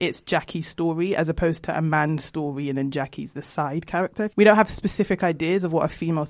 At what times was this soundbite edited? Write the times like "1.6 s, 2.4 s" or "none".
none